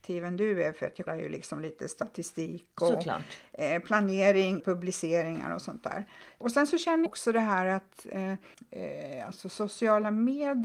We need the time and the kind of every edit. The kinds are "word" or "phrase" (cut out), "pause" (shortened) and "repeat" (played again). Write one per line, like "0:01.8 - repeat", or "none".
0:01.1 - word
0:04.6 - word
0:07.1 - word